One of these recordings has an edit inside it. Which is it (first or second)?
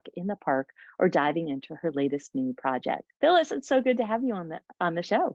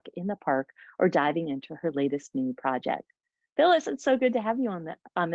first